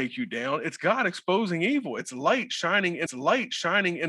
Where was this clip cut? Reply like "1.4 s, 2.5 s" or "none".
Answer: 3.1 s